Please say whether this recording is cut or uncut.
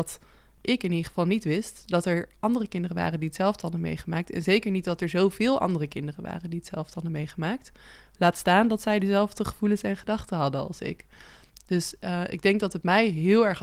uncut